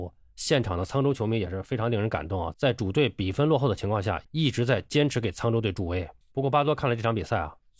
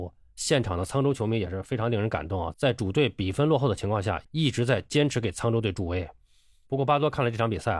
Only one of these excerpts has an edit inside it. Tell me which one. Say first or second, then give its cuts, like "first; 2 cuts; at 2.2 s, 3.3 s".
first; 1 cut; at 6.2 s